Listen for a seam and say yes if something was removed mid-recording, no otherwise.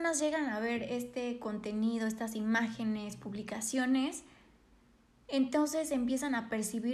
no